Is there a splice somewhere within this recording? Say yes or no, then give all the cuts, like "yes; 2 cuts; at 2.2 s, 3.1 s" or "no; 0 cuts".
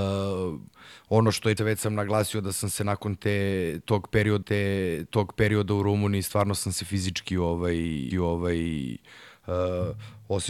yes; 3 cuts; at 1.6 s, 4.4 s, 8.1 s